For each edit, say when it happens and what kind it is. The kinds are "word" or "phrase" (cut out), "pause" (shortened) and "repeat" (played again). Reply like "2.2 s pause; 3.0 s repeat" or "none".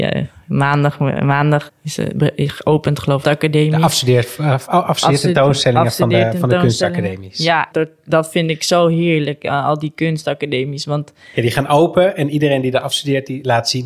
1.7 s word; 3.2 s phrase; 7.7 s phrase

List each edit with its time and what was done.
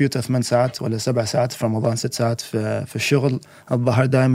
none

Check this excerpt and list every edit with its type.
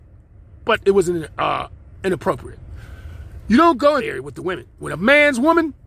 4.0 s phrase

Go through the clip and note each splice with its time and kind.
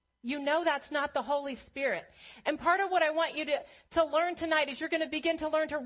none

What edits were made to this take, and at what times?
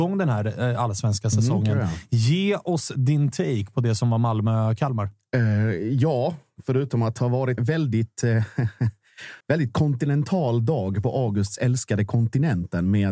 7.6 s word; 9.4 s pause

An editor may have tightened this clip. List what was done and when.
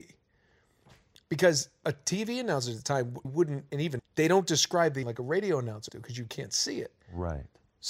3.2 s word; 4.0 s word; 5.0 s word; 5.9 s word

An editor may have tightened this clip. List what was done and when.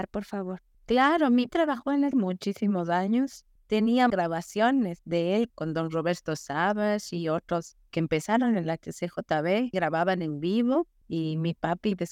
1.5 s word; 2.1 s word; 4.1 s word; 5.5 s word; 7.9 s word; 9.7 s word

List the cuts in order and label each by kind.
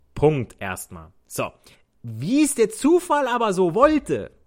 1.7 s pause

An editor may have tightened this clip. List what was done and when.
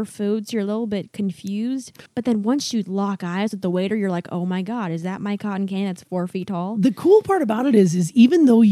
2.1 s pause

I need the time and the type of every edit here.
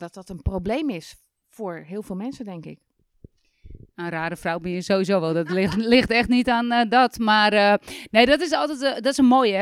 none

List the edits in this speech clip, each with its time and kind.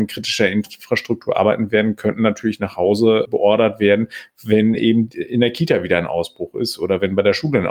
none

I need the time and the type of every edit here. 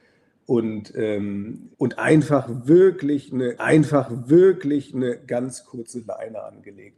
1.7 s pause; 3.6 s repeat

